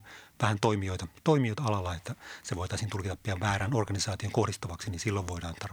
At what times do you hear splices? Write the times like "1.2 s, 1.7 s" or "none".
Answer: none